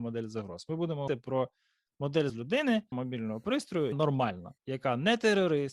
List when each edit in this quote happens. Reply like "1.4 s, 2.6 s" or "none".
1.1 s, 2.3 s, 2.9 s, 3.9 s, 4.6 s